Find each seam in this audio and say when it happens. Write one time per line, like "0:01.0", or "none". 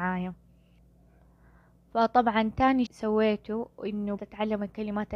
0:02.9
0:04.2